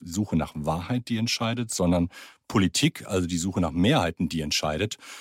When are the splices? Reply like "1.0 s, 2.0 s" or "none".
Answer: none